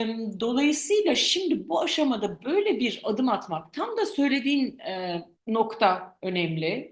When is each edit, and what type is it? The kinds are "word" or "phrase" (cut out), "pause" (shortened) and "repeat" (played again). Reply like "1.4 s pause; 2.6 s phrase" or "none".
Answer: 5.4 s pause

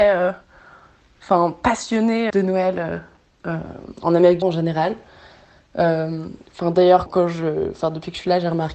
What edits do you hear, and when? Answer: 2.3 s word; 4.4 s word; 7.1 s word

